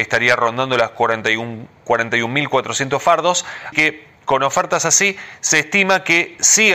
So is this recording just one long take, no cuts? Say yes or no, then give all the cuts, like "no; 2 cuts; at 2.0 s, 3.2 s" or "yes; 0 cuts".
no; 1 cut; at 3.7 s